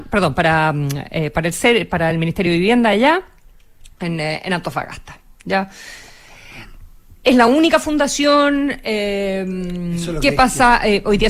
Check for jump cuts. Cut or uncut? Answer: uncut